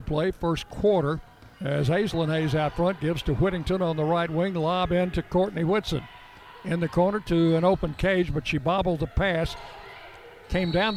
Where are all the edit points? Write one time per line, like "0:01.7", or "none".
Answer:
0:01.5